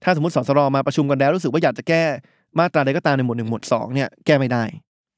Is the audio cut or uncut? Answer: uncut